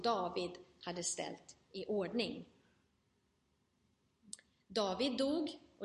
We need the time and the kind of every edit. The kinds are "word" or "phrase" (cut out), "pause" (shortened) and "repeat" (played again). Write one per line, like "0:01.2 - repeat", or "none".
none